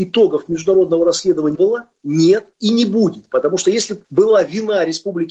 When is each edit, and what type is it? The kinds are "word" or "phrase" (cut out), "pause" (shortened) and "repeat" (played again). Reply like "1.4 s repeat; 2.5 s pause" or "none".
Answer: 1.5 s word; 2.5 s pause; 4.0 s pause